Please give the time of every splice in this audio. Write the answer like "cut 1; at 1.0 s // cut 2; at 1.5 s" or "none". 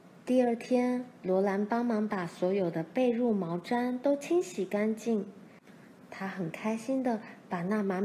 cut 1; at 1.2 s